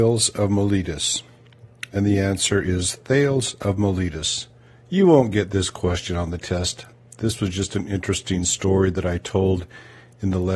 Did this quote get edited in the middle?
no; 0 cuts

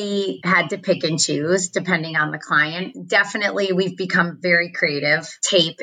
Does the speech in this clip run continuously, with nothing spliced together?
yes; 0 cuts

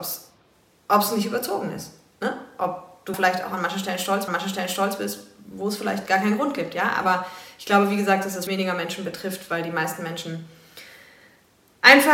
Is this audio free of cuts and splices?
no; 3 cuts; at 3.1 s, 4.3 s, 8.5 s

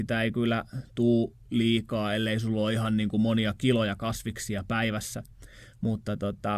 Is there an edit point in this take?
no; 0 cuts

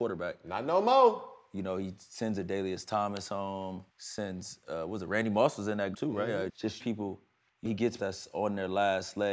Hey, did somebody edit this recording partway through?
yes; 6 cuts; at 3.9 s, 5.9 s, 6.5 s, 6.8 s, 7.7 s, 8.0 s

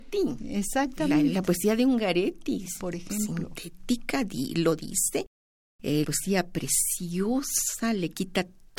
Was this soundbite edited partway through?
yes; 1 cut; at 6.0 s

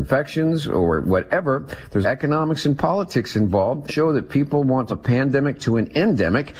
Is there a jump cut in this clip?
yes; 3 cuts; at 2.0 s, 3.9 s, 4.9 s

